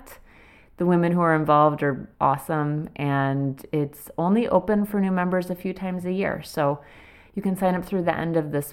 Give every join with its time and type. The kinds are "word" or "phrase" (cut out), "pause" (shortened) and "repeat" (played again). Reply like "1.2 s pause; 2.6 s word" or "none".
2.1 s pause